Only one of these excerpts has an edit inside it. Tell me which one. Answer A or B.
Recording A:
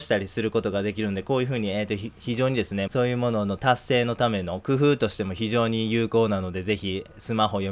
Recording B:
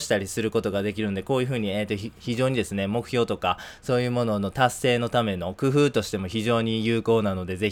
A